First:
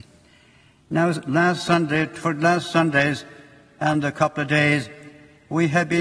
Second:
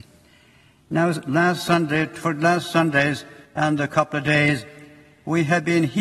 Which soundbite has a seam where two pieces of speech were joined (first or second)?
second